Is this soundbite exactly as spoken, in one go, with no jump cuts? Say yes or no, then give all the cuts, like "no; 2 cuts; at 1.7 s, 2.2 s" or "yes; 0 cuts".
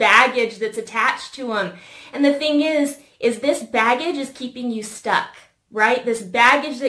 yes; 0 cuts